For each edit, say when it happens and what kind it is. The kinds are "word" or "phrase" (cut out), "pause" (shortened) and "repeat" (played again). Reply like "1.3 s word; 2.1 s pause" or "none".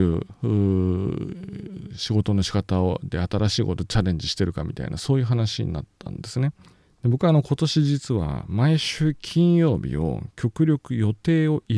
6.7 s pause